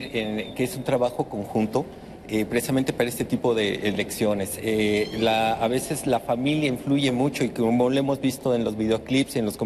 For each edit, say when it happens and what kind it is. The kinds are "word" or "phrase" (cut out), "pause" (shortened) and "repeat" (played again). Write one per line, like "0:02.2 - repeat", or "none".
none